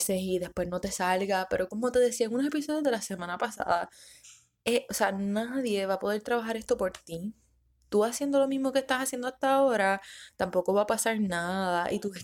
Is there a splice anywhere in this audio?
no; 0 cuts

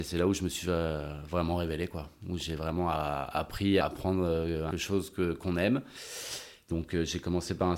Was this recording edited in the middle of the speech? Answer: yes; 2 cuts; at 3.8 s, 4.7 s

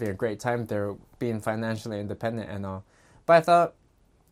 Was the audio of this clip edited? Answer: no; 0 cuts

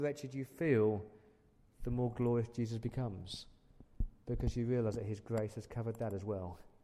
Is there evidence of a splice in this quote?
no; 0 cuts

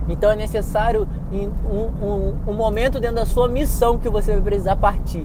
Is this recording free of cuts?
yes; 0 cuts

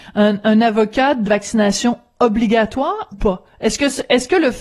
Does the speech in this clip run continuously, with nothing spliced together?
no; 2 cuts; at 1.2 s, 3.1 s

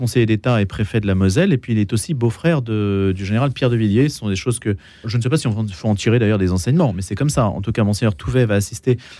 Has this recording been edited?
yes; 1 cut; at 5.0 s

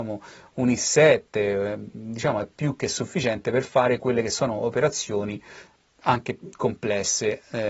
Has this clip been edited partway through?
no; 0 cuts

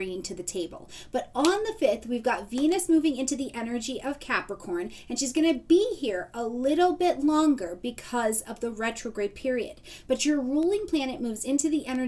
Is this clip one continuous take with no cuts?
yes; 0 cuts

